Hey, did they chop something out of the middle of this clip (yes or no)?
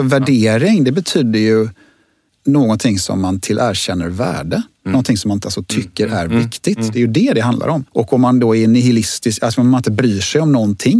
yes